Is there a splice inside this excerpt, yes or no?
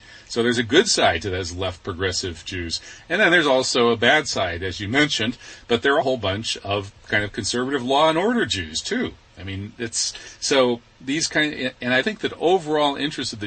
yes